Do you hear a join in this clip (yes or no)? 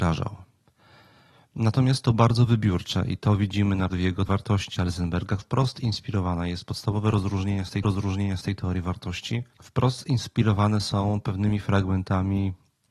yes